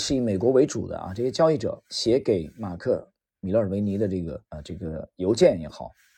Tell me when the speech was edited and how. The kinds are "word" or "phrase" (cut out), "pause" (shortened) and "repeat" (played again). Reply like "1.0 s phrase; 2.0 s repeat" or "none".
4.4 s pause